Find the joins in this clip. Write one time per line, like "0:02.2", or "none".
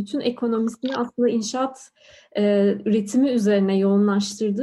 none